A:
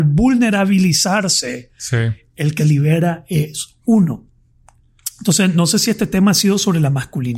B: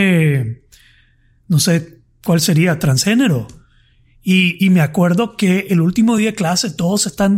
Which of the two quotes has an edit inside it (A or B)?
A